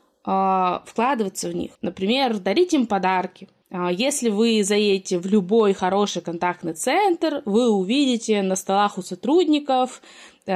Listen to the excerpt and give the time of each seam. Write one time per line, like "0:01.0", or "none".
0:01.7